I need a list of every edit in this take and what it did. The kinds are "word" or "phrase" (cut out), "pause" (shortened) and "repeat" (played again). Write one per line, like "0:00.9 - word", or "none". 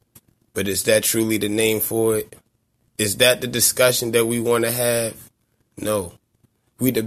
none